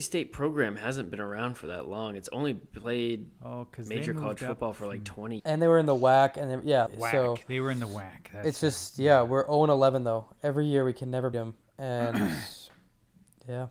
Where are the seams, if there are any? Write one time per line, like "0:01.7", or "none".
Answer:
0:05.4
0:06.9
0:11.3